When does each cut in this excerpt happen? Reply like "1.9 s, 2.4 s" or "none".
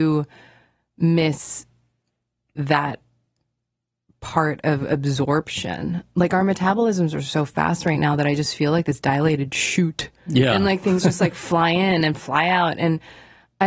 none